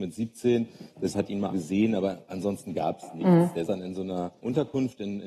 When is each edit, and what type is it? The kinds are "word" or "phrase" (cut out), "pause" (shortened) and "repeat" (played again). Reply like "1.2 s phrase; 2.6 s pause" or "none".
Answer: 1.1 s word; 1.5 s word; 3.7 s word; 4.4 s pause